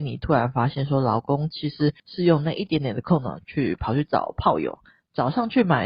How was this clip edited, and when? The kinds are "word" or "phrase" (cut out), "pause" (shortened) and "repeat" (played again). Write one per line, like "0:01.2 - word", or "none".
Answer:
0:02.0 - pause